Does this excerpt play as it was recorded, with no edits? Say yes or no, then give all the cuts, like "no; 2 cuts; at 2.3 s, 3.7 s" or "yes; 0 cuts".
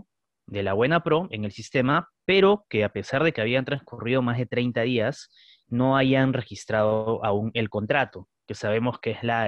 yes; 0 cuts